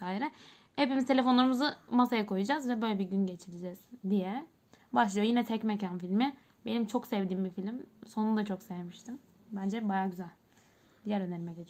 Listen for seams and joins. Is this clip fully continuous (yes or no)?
yes